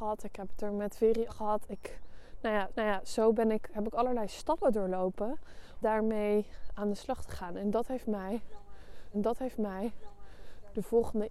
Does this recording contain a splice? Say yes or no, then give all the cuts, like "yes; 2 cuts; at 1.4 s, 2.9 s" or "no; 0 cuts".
yes; 4 cuts; at 1.3 s, 2.7 s, 5.8 s, 9.1 s